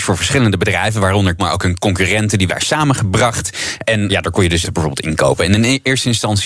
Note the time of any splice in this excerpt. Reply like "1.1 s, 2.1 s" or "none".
1.4 s, 2.5 s, 4.1 s, 4.6 s